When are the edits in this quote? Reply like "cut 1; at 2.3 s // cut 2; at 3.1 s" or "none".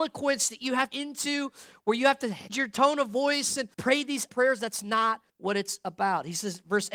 cut 1; at 0.9 s // cut 2; at 2.5 s // cut 3; at 3.7 s // cut 4; at 4.3 s // cut 5; at 5.3 s